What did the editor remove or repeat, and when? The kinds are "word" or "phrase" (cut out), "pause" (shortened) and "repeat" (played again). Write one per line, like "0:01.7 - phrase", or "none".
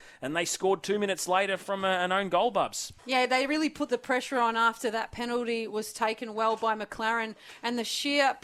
0:03.0 - pause